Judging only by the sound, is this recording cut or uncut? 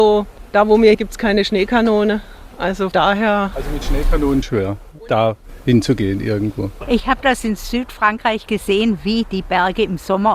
cut